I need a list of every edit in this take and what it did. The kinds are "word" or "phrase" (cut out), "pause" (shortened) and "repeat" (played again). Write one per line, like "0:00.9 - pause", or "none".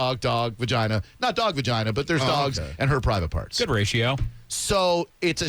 none

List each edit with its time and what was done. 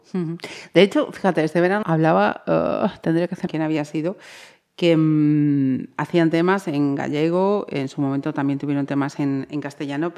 0:01.8 - word
0:03.5 - phrase

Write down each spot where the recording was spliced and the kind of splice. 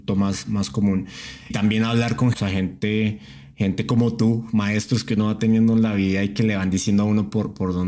0:01.5 - phrase
0:02.3 - phrase

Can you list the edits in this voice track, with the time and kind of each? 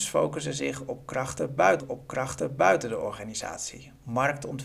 0:01.8 - repeat

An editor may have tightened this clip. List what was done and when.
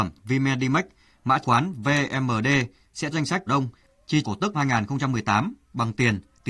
0:01.4 - word
0:03.1 - word
0:03.5 - word
0:04.2 - word
0:04.5 - word

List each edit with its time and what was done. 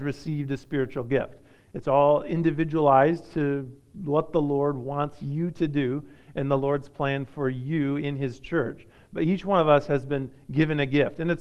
none

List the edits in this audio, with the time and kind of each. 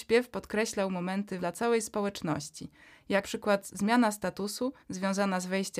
0:01.4 - word
0:03.2 - word
0:04.8 - pause

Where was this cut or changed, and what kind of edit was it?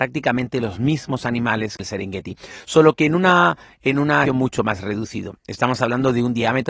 0:01.8 - word
0:04.3 - word

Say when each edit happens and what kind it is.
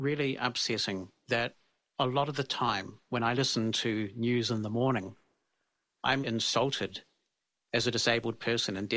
0:06.2 - word

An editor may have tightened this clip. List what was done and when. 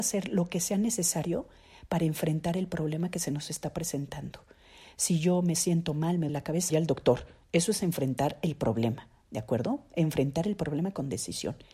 0:06.3 - word
0:06.7 - word

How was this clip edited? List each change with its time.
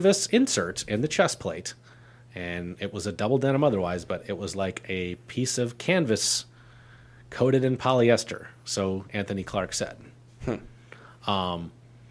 none

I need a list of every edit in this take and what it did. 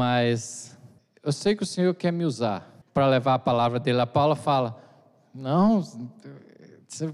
0:01.0 - pause
0:02.8 - pause

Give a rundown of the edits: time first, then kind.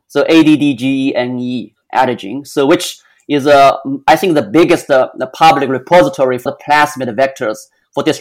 0:06.5 - word

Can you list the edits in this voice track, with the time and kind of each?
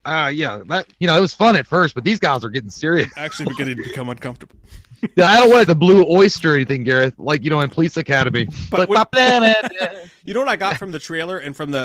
0:00.9 - pause
0:05.3 - word
0:05.7 - phrase
0:09.1 - word

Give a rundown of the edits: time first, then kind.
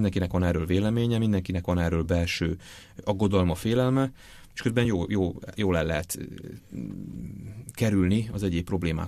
none

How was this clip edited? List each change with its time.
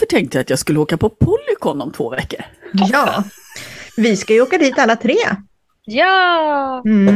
none

